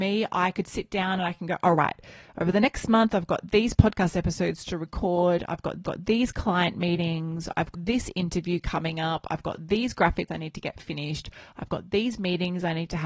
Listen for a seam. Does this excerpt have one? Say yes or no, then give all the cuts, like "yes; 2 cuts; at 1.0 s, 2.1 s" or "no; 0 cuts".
yes; 3 cuts; at 5.8 s, 7.7 s, 10.3 s